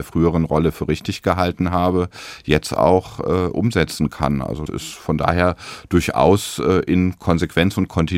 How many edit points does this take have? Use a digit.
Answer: 1